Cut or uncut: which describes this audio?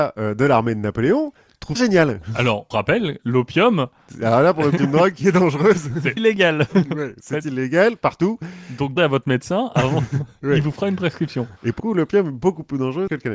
cut